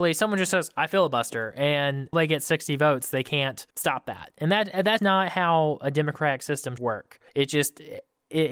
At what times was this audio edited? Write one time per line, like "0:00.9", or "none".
0:02.1
0:03.7
0:05.0
0:06.8
0:07.3